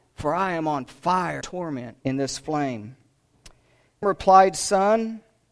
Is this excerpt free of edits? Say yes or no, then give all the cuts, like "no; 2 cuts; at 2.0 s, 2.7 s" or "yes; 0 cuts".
no; 3 cuts; at 1.4 s, 2.0 s, 4.0 s